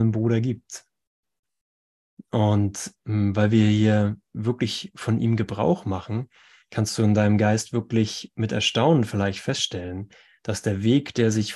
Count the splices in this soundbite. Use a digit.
0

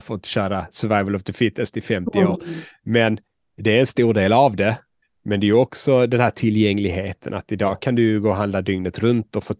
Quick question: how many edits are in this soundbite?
0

